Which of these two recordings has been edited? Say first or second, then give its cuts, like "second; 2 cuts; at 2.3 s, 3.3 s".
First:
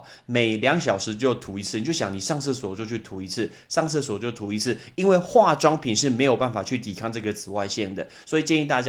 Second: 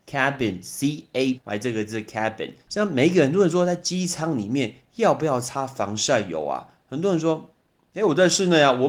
second; 2 cuts; at 1.4 s, 2.6 s